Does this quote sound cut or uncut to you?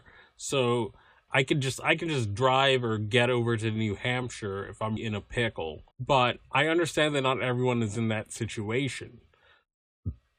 cut